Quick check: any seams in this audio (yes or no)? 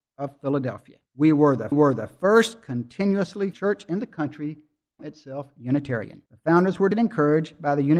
yes